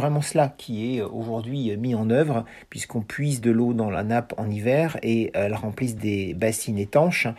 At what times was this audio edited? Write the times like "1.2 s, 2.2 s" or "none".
none